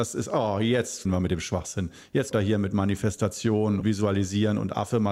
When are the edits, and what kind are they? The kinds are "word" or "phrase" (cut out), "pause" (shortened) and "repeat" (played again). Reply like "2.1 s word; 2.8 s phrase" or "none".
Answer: 1.0 s word; 2.3 s word; 3.8 s word

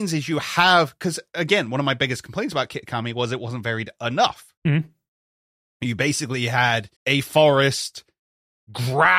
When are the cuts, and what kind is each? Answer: 4.6 s pause; 7.0 s pause

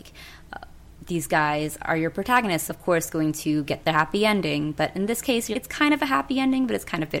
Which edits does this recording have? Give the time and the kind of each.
2.7 s phrase; 3.8 s word; 5.5 s word

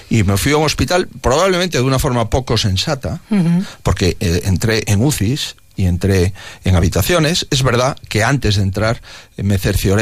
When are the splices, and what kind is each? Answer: none

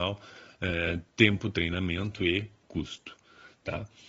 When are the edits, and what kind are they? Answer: 1.1 s pause

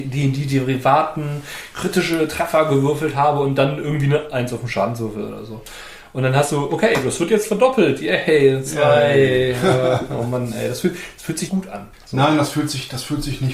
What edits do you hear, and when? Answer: 11.5 s word; 11.9 s pause

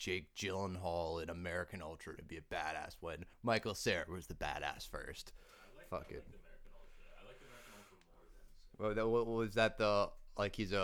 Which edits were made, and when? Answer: 2.2 s word; 3.3 s pause; 8.7 s pause

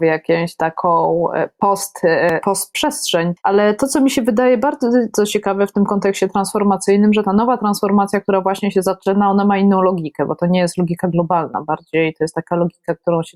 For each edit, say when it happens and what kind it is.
3.4 s pause

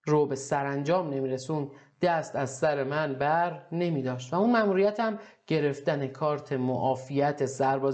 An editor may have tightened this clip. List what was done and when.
none

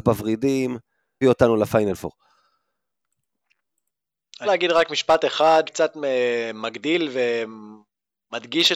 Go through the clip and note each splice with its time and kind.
1.2 s word; 4.5 s word; 5.7 s word

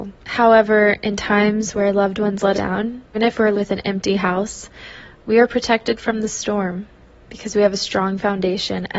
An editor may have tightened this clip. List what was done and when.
2.5 s word; 3.1 s word; 3.5 s word

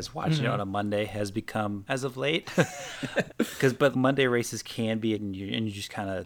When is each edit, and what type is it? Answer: 1.9 s phrase; 3.3 s word; 3.9 s word; 5.1 s word

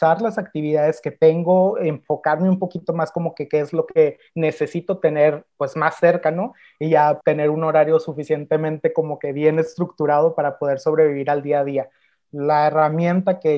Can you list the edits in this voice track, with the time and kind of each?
7.2 s word

